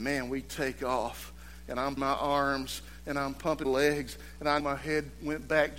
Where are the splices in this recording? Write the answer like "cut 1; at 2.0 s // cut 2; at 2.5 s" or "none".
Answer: cut 1; at 2.0 s // cut 2; at 3.6 s // cut 3; at 4.6 s